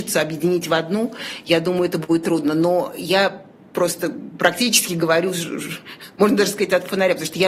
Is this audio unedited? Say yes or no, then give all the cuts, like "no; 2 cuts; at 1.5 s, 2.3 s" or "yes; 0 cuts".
yes; 0 cuts